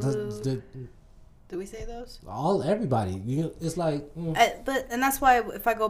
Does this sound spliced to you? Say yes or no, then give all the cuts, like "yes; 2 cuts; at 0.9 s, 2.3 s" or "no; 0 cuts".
yes; 2 cuts; at 3.6 s, 4.8 s